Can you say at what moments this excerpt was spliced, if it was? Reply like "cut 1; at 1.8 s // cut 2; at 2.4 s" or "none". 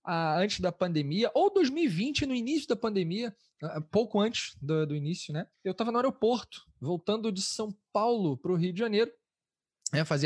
cut 1; at 5.5 s